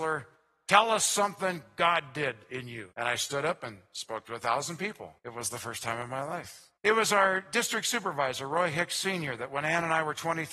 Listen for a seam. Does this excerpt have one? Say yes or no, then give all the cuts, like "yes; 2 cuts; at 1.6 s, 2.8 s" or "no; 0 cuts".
yes; 3 cuts; at 2.9 s, 5.2 s, 6.8 s